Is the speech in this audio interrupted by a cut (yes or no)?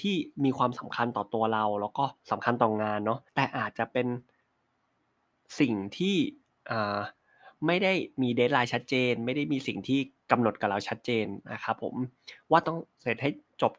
yes